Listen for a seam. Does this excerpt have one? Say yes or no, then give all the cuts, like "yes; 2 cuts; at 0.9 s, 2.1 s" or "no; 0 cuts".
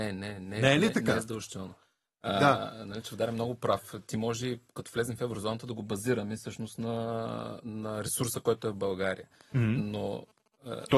no; 0 cuts